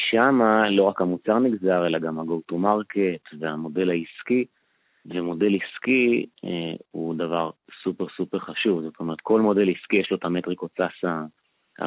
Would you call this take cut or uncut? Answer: uncut